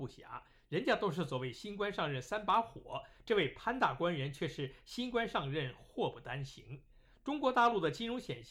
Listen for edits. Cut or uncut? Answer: uncut